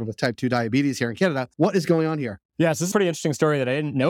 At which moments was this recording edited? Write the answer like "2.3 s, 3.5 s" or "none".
2.9 s

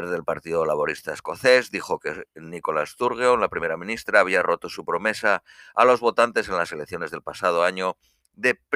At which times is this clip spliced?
none

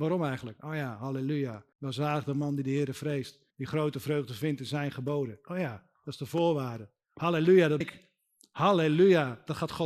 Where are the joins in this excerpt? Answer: 1.7 s, 3.5 s, 7.8 s

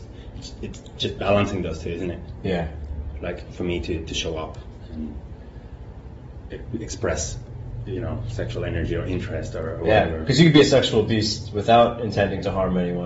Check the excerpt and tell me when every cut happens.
none

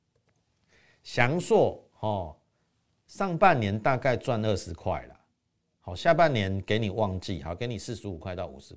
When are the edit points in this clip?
1.9 s

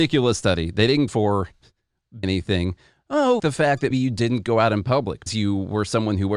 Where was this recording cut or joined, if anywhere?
1.1 s, 2.2 s, 3.4 s, 3.9 s, 5.3 s

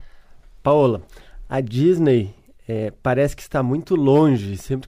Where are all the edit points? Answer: none

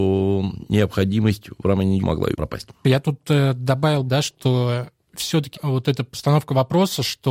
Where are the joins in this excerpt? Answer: 2.0 s, 4.1 s, 5.5 s

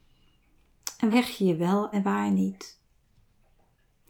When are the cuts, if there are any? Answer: 1.1 s, 1.9 s

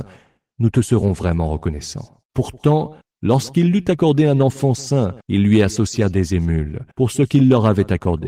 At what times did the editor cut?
3.0 s, 5.2 s, 6.9 s

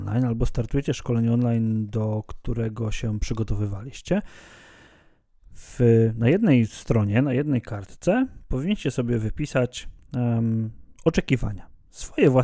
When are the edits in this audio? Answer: none

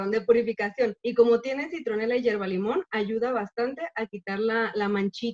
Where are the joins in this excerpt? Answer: 1.0 s

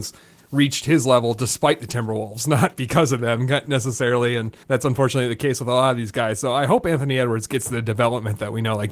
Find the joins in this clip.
4.6 s

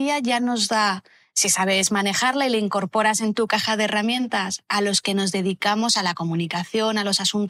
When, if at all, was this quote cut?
none

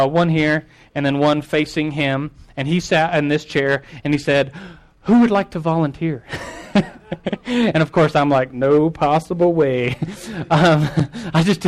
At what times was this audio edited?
none

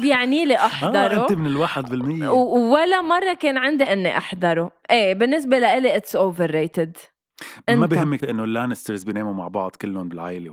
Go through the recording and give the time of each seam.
3.9 s, 8.2 s

